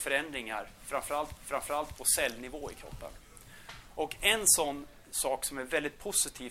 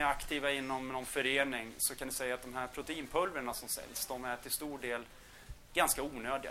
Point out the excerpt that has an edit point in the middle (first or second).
first